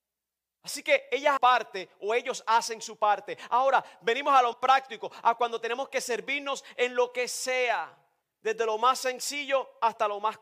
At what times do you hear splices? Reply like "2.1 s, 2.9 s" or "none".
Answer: 1.4 s, 4.5 s, 8.2 s

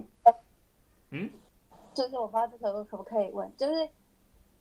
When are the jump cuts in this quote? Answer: 1.5 s

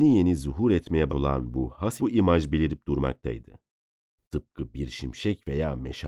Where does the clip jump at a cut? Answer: 1.1 s, 2.0 s

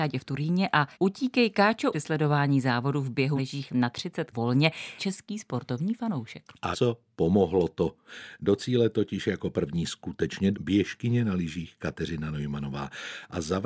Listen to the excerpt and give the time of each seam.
0.9 s, 1.9 s, 3.4 s, 4.3 s, 5.0 s, 6.7 s, 10.5 s

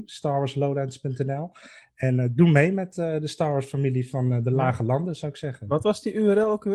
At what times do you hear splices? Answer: none

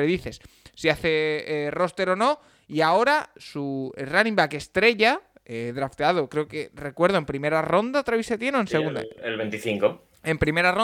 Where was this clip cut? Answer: none

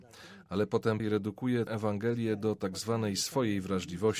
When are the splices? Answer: 1.0 s, 1.7 s

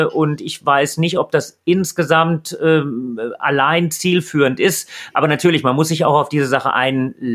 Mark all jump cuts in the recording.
none

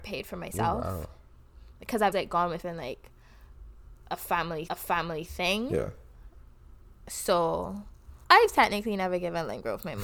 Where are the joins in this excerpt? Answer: 2.1 s, 2.6 s, 4.7 s, 8.2 s

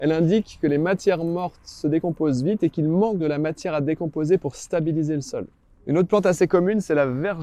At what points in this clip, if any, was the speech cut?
3.2 s

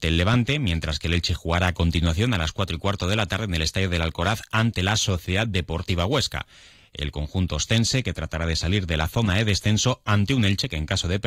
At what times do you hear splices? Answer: none

